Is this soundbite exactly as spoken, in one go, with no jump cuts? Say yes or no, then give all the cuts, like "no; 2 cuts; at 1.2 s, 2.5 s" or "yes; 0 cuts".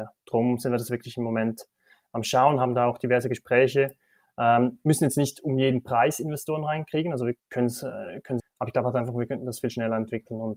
no; 2 cuts; at 7.4 s, 8.4 s